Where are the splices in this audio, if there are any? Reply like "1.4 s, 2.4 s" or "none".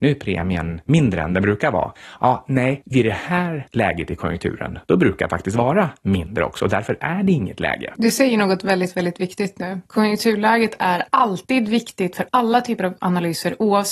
5.3 s